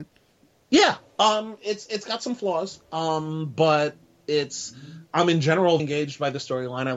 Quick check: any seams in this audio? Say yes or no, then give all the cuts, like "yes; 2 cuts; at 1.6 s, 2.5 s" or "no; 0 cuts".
yes; 1 cut; at 5.8 s